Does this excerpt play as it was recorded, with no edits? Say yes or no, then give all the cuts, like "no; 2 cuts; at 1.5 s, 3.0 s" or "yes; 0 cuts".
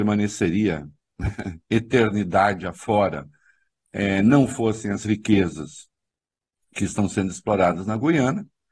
yes; 0 cuts